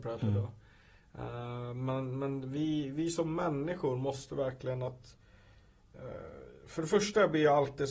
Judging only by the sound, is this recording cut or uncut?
uncut